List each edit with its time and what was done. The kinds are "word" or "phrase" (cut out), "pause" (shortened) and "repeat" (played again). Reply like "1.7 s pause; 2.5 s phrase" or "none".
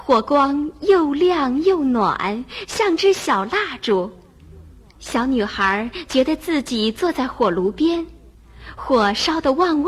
none